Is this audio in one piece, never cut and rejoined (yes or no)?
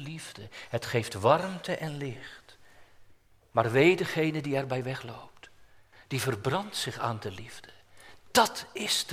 yes